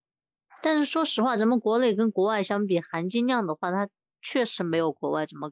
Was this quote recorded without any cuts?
yes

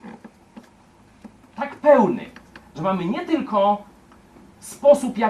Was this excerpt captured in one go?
yes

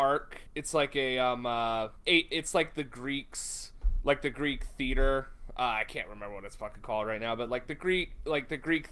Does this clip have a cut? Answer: no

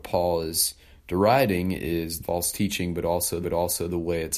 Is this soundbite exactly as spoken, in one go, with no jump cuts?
no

